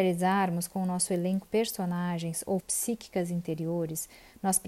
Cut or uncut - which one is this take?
cut